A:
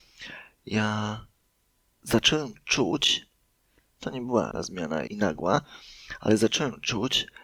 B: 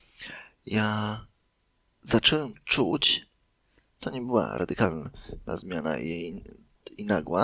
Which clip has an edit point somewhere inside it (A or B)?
A